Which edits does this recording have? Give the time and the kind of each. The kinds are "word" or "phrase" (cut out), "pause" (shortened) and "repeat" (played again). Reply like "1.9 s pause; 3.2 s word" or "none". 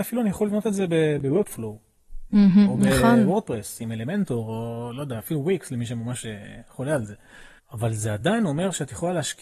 7.6 s pause